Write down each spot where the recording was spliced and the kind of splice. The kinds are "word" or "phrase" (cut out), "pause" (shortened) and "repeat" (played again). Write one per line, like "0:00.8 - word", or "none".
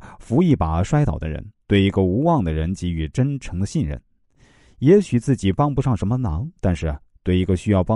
0:01.6 - pause
0:06.6 - pause